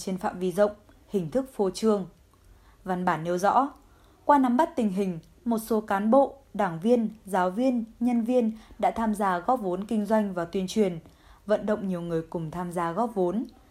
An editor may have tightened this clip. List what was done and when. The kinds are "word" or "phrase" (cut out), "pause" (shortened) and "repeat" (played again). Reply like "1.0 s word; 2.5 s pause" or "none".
none